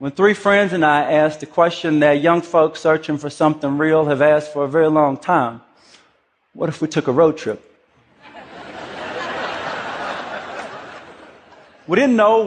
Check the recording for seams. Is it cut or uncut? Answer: uncut